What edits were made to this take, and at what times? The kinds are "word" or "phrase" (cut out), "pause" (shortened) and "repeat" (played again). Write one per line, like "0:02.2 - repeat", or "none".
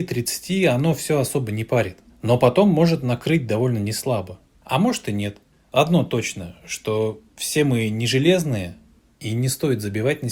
0:02.1 - pause
0:07.3 - pause